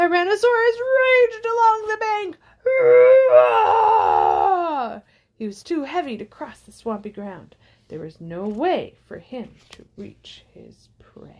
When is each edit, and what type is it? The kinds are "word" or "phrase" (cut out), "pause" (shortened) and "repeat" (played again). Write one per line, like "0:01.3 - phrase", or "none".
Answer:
none